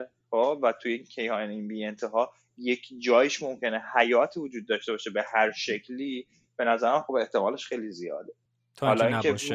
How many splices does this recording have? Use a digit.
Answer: 0